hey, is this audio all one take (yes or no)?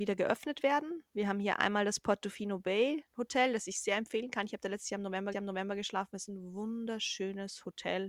no